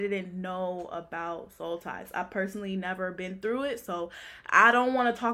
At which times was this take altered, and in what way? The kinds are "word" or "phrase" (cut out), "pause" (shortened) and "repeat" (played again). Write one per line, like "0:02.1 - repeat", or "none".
none